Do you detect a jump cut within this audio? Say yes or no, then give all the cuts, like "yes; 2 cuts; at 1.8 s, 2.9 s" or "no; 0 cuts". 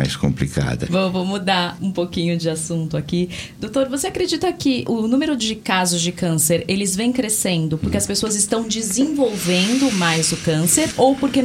yes; 1 cut; at 1.8 s